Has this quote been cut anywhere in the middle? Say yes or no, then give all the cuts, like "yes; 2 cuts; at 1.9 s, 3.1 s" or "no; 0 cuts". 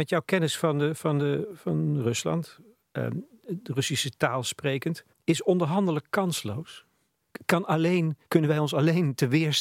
yes; 2 cuts; at 5.1 s, 8.3 s